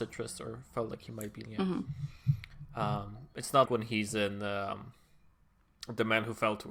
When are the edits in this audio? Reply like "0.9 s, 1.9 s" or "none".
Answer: 1.5 s, 3.7 s